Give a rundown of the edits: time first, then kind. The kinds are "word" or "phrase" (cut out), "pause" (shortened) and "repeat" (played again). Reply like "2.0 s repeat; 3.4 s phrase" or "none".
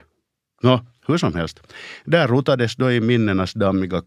none